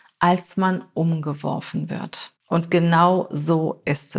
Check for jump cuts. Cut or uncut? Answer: cut